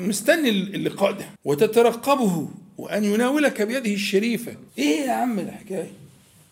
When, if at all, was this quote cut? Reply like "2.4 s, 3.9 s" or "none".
1.4 s, 4.7 s